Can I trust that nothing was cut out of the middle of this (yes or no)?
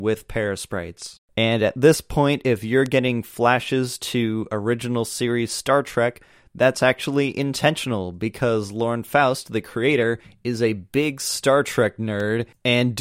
yes